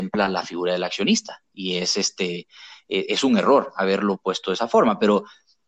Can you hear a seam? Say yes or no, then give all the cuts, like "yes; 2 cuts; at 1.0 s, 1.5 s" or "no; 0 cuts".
no; 0 cuts